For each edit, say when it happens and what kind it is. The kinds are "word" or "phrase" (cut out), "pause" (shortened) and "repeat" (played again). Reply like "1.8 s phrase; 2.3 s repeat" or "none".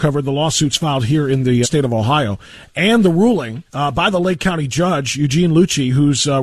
1.6 s word; 3.7 s pause